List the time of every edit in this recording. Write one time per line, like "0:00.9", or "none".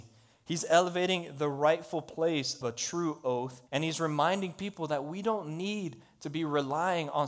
0:02.6
0:03.7